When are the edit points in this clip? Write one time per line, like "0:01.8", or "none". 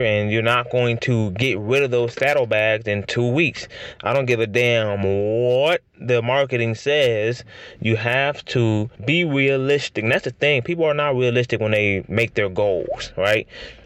0:08.9

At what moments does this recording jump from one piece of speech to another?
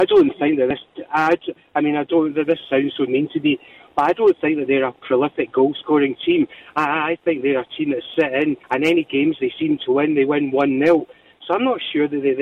0:03.1
0:08.6

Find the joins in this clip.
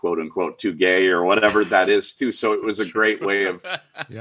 none

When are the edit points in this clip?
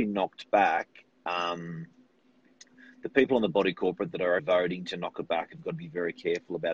0:04.4

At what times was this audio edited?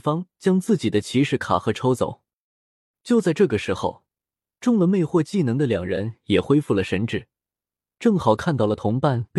none

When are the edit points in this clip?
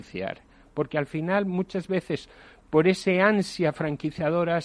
none

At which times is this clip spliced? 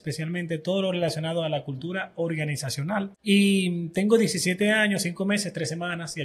0:03.2

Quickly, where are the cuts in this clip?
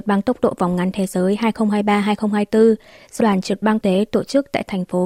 0:03.2
0:03.8

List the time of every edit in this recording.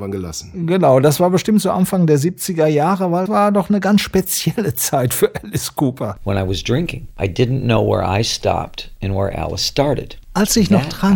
0:03.3

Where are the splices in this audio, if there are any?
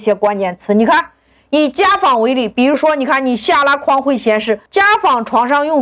0:04.7

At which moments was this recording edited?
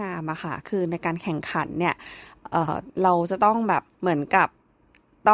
0:03.9

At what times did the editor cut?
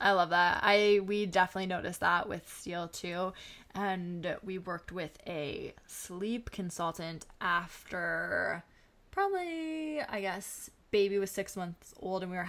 none

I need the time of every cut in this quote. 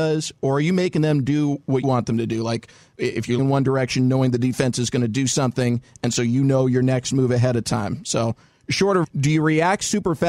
0:01.8
0:03.4
0:09.0

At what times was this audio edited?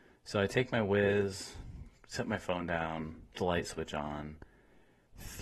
0:03.3

